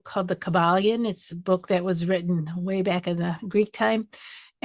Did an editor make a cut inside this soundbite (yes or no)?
no